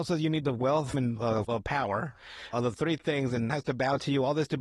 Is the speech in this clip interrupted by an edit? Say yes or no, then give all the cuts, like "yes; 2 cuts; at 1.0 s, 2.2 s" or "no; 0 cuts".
yes; 4 cuts; at 0.9 s, 1.4 s, 2.5 s, 3.5 s